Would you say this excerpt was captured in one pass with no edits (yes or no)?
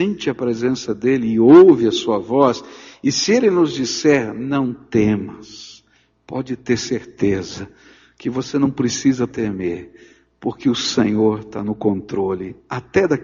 yes